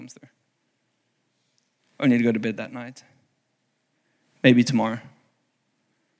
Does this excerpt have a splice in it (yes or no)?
no